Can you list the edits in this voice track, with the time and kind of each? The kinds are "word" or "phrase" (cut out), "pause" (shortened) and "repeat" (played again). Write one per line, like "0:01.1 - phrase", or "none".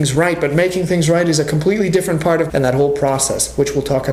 0:02.5 - phrase